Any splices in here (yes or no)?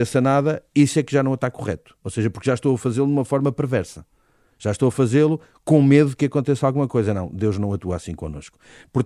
no